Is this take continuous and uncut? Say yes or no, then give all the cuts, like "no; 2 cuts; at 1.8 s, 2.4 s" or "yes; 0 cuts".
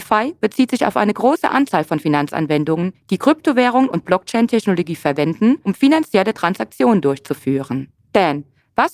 yes; 0 cuts